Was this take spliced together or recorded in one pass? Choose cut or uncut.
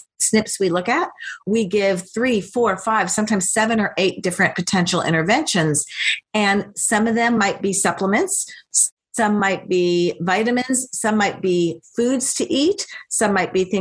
uncut